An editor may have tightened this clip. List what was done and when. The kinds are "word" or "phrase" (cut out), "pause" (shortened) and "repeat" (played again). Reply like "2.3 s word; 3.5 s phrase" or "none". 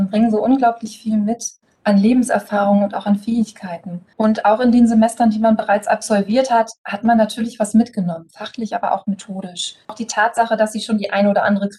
none